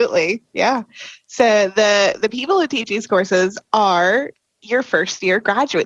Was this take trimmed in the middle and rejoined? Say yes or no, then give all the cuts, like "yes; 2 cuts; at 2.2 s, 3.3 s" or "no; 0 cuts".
no; 0 cuts